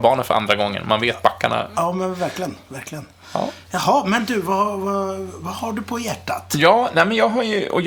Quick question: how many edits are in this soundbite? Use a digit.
0